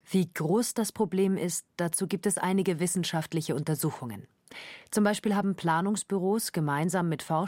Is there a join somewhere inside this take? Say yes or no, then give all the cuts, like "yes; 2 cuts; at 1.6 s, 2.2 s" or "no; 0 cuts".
no; 0 cuts